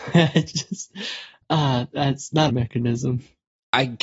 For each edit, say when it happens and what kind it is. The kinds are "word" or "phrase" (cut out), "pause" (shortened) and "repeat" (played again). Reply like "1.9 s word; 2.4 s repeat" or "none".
1.4 s pause; 2.5 s phrase